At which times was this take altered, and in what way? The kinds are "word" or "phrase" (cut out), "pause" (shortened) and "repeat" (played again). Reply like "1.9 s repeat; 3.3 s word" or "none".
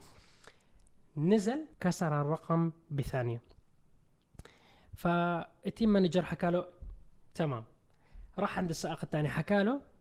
1.7 s pause

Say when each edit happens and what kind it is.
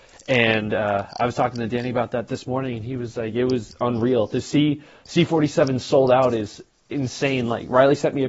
none

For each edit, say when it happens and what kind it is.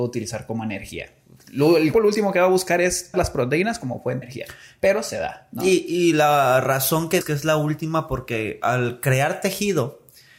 1.9 s word; 3.1 s word; 4.2 s word; 7.2 s word

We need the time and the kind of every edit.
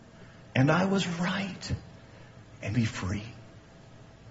2.7 s word

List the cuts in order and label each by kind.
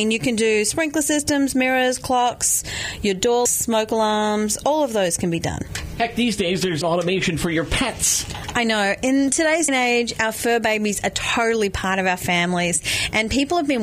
3.5 s word; 6.8 s word; 9.7 s word

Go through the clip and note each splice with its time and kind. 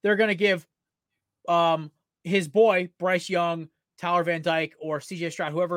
none

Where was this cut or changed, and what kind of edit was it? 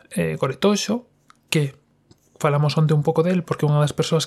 none

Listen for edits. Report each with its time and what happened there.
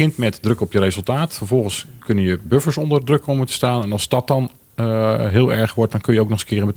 none

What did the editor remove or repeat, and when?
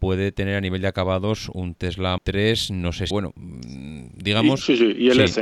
2.2 s word; 3.1 s phrase

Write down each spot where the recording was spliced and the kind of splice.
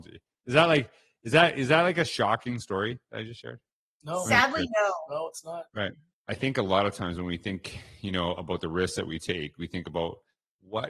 none

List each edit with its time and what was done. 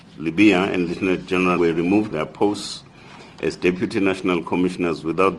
1.6 s word; 2.1 s word

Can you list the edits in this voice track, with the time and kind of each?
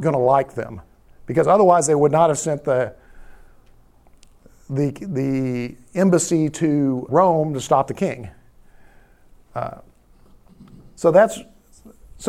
7.1 s word

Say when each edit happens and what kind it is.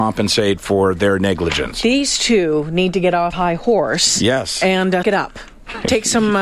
3.3 s word; 5.0 s word

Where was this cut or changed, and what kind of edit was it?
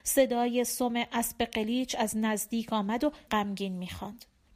3.3 s word

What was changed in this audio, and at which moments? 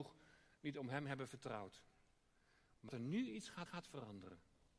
2.9 s word; 3.7 s repeat

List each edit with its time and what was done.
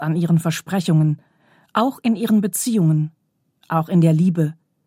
none

